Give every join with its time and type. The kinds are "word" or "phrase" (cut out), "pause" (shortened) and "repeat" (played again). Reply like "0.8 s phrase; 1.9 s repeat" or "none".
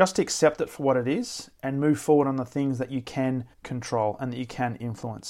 3.5 s pause